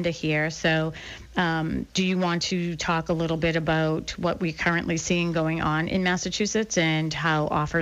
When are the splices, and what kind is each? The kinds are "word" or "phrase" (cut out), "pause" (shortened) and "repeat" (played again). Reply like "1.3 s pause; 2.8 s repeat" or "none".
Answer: 1.9 s pause

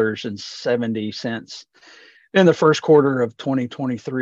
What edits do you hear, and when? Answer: none

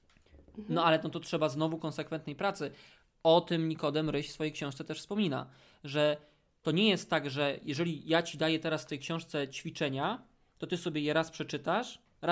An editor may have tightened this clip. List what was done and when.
none

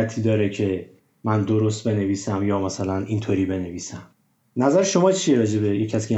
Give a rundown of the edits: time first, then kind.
none

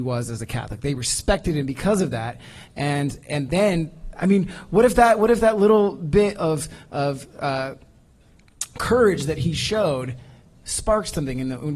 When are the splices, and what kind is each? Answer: none

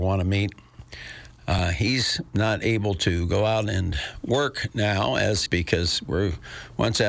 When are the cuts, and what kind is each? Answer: 5.5 s phrase

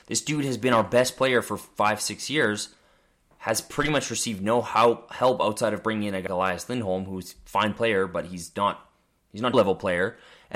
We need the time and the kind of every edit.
6.3 s word; 9.5 s phrase

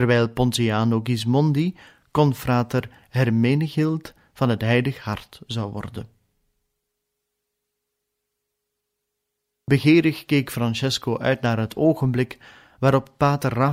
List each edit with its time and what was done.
none

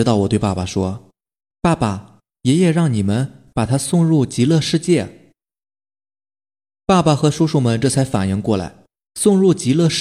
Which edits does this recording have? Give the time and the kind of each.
none

